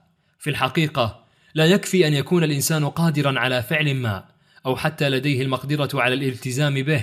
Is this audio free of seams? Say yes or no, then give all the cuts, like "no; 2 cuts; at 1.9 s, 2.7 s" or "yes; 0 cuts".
yes; 0 cuts